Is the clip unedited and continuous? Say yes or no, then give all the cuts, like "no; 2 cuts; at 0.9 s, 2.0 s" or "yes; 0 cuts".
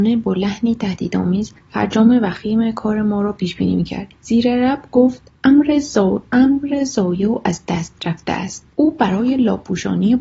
no; 4 cuts; at 1.6 s, 4.1 s, 5.3 s, 8.7 s